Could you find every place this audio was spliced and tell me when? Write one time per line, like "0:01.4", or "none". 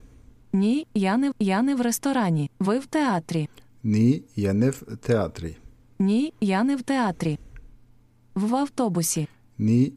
0:01.3
0:02.6
0:05.9